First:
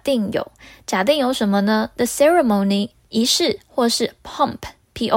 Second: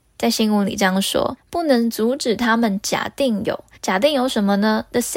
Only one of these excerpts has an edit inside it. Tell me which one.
second; 1 cut; at 3.7 s

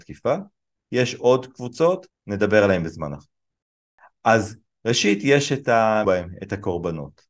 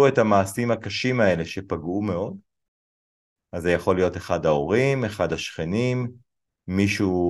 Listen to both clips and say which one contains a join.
first; 2 cuts; at 2.1 s, 6.0 s

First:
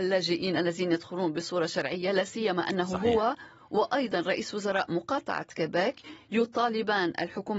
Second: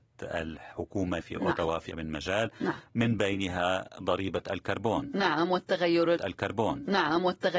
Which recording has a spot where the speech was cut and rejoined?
second; 3 cuts; at 1.2 s, 1.9 s, 6.2 s

